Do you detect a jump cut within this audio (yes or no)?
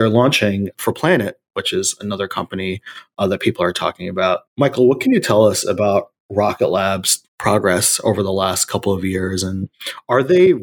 yes